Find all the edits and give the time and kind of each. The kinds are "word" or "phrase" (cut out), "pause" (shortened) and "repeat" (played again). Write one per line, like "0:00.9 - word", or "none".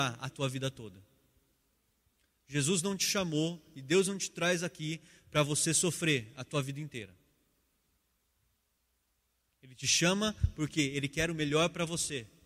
none